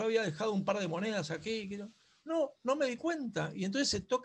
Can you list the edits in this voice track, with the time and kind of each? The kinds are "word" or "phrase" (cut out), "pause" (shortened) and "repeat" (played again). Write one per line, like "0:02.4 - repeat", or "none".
none